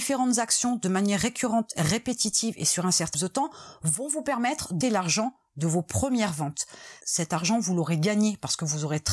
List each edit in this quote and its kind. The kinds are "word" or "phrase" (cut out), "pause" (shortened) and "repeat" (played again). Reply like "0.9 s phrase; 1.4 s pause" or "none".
3.1 s word; 4.8 s word

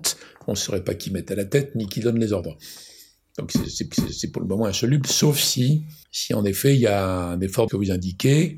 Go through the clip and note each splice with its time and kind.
3.9 s repeat; 6.0 s pause; 7.7 s phrase

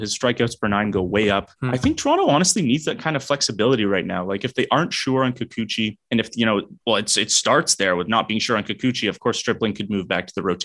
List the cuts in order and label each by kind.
1.5 s pause; 6.0 s pause; 6.8 s pause

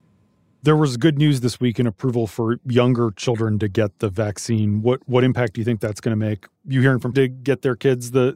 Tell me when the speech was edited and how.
6.6 s pause; 7.1 s phrase

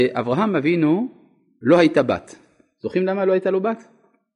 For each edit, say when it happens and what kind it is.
none

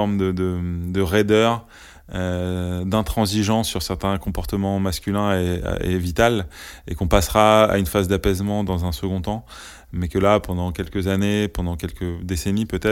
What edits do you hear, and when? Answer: none

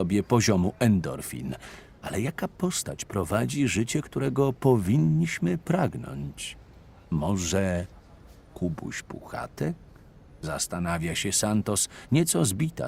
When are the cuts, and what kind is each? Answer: none

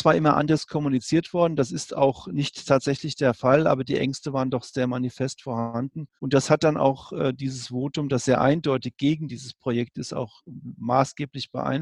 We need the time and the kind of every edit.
6.2 s pause

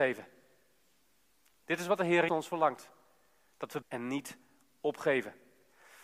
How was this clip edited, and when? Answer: 2.3 s word; 3.8 s word

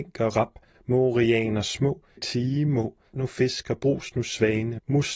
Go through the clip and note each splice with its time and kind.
2.2 s word; 3.1 s word

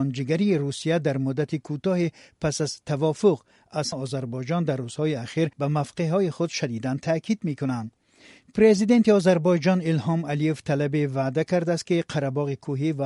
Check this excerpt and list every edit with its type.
3.9 s phrase; 5.5 s pause

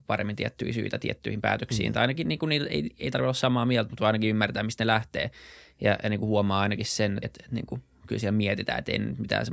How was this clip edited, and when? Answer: 7.2 s word

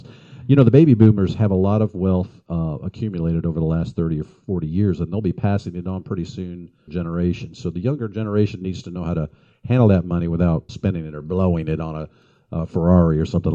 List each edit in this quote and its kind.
6.9 s phrase; 10.7 s word

